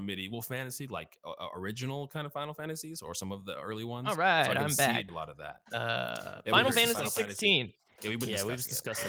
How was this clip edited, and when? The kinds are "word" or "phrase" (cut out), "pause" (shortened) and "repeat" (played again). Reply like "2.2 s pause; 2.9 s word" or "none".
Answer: 5.1 s word